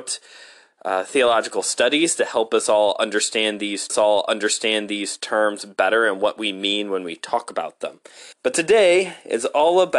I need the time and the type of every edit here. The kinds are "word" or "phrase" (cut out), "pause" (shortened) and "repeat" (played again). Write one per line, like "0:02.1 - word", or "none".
0:03.9 - repeat
0:08.3 - pause